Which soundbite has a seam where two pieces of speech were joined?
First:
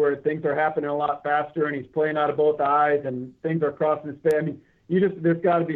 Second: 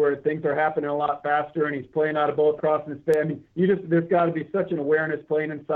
second; 2 cuts; at 2.6 s, 3.4 s

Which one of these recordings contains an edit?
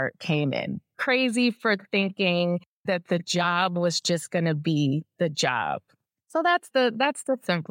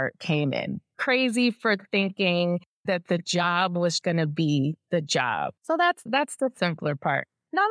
second; 3 cuts; at 4.0 s, 5.6 s, 6.1 s

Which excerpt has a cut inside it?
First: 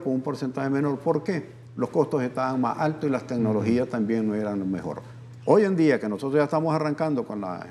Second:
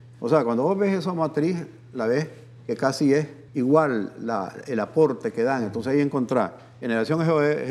second; 1 cut; at 3.5 s

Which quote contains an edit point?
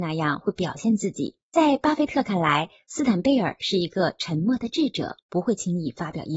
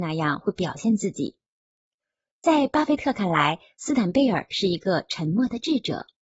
first; 2 cuts; at 1.4 s, 5.2 s

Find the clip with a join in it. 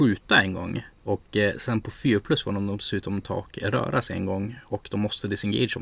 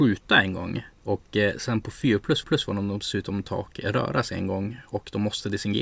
second; 1 cut; at 2.4 s

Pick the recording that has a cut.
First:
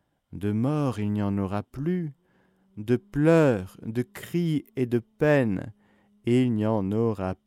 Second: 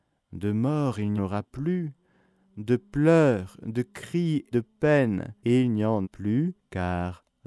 second; 5 cuts; at 1.2 s, 4.5 s, 5.4 s, 6.0 s, 6.6 s

